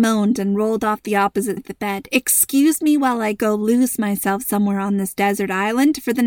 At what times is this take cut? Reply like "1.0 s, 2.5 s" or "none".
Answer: 1.6 s